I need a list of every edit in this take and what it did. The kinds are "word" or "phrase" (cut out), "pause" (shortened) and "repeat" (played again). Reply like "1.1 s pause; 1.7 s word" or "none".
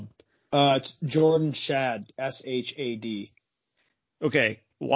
none